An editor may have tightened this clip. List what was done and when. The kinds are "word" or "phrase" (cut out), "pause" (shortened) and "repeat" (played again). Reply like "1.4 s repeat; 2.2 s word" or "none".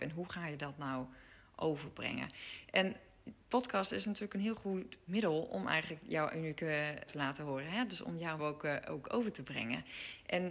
5.1 s word; 7.1 s word; 8.4 s word